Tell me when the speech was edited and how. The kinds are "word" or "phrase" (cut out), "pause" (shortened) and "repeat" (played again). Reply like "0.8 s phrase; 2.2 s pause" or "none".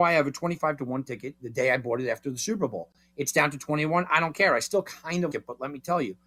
5.3 s word